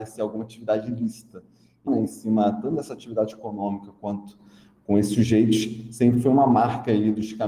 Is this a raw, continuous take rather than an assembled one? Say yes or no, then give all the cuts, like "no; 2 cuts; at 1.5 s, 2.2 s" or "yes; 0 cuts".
no; 1 cut; at 1.9 s